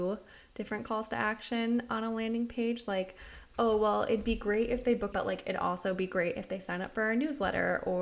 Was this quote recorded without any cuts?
no; 1 cut; at 5.1 s

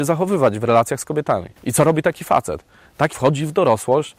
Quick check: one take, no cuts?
no; 2 cuts; at 1.6 s, 3.1 s

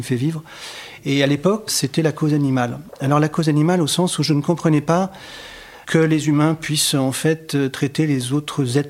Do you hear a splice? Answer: yes; 2 cuts; at 1.7 s, 5.8 s

